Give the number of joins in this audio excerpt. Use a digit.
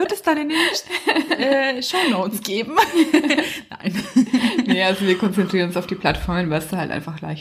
0